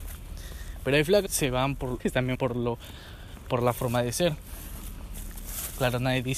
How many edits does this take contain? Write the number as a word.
three